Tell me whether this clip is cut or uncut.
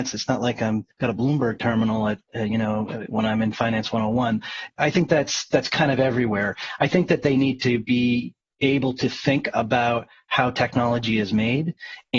cut